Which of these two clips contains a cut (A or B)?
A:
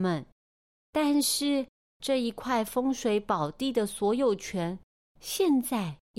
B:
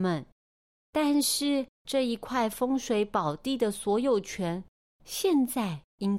B